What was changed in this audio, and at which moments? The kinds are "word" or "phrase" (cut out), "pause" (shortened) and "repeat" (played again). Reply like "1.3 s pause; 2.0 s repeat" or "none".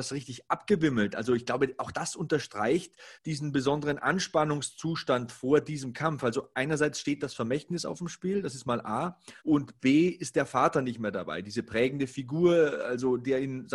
3.1 s pause; 9.4 s pause